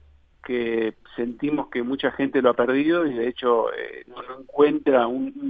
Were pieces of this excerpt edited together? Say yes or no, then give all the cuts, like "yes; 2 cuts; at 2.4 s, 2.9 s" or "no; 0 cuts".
no; 0 cuts